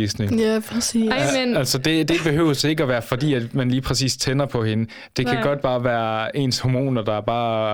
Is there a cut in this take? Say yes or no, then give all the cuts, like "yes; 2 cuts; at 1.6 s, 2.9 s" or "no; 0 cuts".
no; 0 cuts